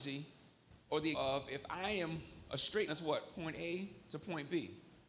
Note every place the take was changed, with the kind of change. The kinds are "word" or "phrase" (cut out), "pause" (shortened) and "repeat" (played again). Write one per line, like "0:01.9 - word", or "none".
0:01.1 - word
0:02.9 - word
0:03.3 - word